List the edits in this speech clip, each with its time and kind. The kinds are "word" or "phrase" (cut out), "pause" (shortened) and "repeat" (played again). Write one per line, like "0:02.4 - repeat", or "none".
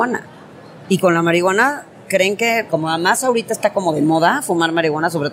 0:02.7 - word